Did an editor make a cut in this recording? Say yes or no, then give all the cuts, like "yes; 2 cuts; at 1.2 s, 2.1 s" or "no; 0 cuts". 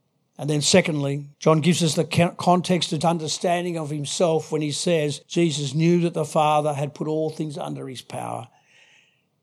yes; 3 cuts; at 1.3 s, 3.0 s, 5.2 s